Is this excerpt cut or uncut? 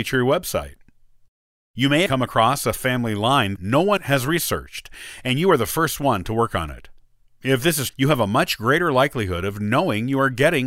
cut